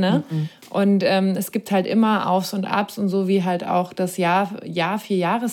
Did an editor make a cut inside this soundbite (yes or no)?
no